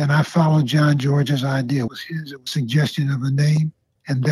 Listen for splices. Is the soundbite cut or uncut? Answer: cut